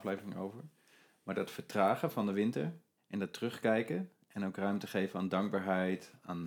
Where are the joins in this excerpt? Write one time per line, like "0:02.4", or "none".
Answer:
0:03.0

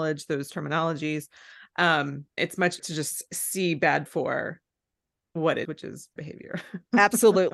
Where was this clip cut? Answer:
0:02.4
0:02.8
0:04.1
0:05.6
0:06.2

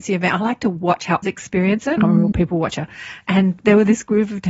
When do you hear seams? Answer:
0:01.2
0:02.0
0:02.3

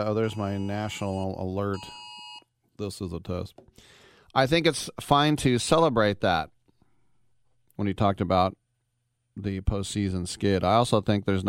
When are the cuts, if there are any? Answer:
none

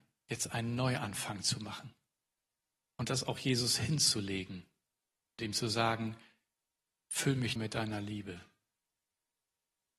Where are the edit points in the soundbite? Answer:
0:05.4
0:07.6

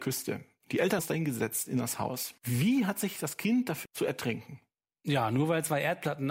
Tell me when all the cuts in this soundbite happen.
0:01.0
0:02.4
0:03.9

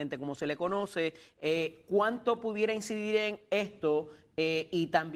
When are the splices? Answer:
none

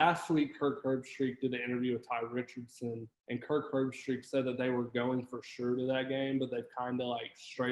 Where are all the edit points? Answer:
0:03.1

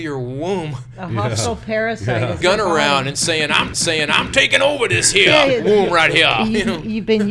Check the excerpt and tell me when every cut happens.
0:02.4
0:03.7

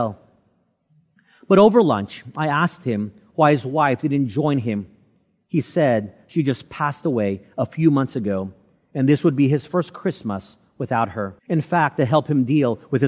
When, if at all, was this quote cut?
0:11.4

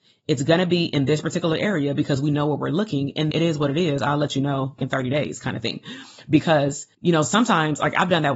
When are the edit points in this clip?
0:03.3
0:04.8
0:06.9

